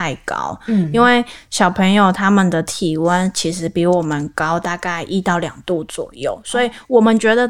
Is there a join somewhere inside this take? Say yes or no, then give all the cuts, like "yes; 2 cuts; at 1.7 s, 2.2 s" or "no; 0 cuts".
no; 0 cuts